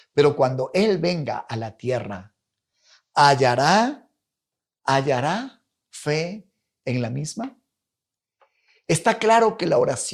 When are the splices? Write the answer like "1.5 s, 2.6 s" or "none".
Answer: none